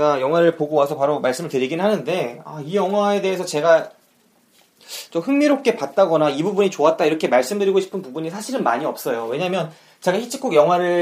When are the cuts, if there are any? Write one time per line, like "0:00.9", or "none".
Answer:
none